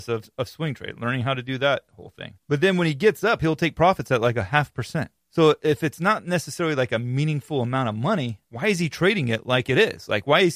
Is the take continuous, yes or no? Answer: no